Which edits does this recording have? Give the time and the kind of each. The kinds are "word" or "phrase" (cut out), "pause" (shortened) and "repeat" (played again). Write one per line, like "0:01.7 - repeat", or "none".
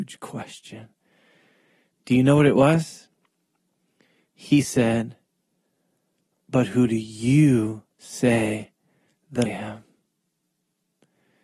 0:07.9 - pause
0:09.5 - word